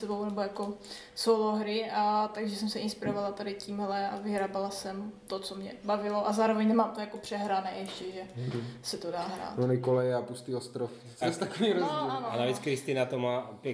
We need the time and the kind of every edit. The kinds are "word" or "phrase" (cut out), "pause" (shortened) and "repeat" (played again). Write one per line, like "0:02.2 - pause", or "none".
0:11.2 - word